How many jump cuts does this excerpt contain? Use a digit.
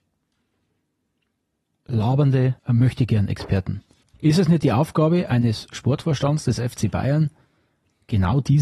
2